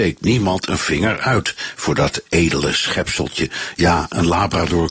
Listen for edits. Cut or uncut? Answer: uncut